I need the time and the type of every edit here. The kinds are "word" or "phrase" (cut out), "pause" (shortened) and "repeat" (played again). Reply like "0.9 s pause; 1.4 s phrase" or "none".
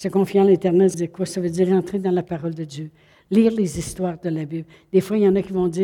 0.9 s word